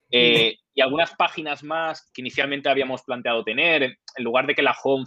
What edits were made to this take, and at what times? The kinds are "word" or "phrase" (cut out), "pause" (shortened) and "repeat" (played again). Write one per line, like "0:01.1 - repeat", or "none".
0:02.1 - word